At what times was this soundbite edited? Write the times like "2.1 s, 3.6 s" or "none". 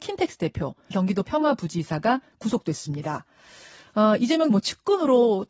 0.9 s, 4.5 s